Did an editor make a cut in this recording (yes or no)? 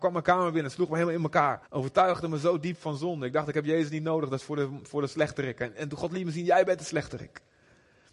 yes